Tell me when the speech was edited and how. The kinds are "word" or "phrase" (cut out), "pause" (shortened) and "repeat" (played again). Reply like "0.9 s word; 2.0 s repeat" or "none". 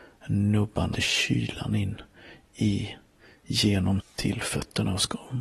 0.9 s word; 4.0 s phrase